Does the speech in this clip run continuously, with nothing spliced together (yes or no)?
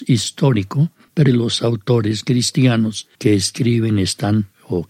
no